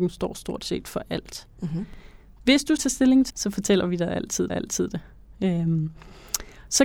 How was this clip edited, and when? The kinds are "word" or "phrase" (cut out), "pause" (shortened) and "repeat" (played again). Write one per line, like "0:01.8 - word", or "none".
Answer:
0:02.8 - word
0:03.3 - word
0:04.5 - repeat